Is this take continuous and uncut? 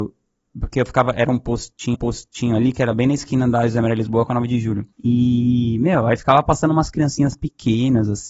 no; 2 cuts; at 1.9 s, 4.9 s

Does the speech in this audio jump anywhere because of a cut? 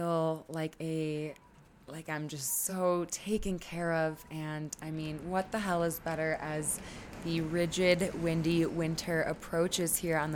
no; 0 cuts

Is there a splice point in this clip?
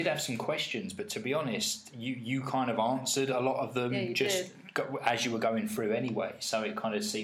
no; 0 cuts

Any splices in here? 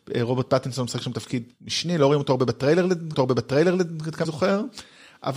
yes; 3 cuts; at 1.5 s, 3.1 s, 4.2 s

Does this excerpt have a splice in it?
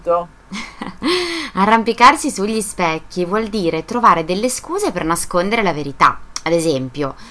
no; 0 cuts

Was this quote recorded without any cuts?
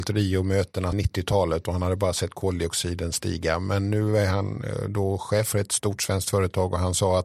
no; 1 cut; at 0.9 s

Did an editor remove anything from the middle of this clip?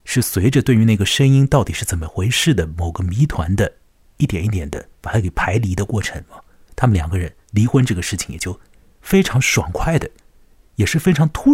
yes; 2 cuts; at 5.0 s, 7.4 s

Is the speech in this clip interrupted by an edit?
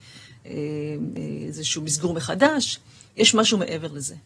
no; 0 cuts

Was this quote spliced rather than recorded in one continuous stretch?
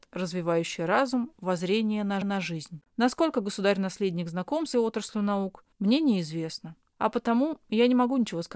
yes; 5 cuts; at 1.3 s, 2.2 s, 4.7 s, 5.7 s, 6.9 s

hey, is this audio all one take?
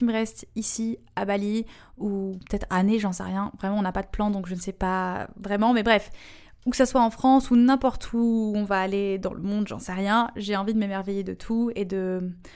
yes; 0 cuts

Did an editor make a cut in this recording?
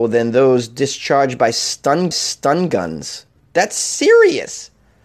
yes; 1 cut; at 2.1 s

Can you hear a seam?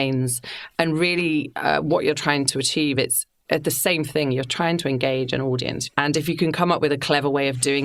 no; 0 cuts

